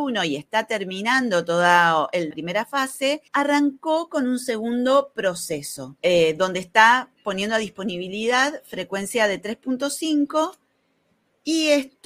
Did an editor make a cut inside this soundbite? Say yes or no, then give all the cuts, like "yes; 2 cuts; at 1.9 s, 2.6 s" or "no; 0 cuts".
yes; 3 cuts; at 2.3 s, 3.3 s, 6.0 s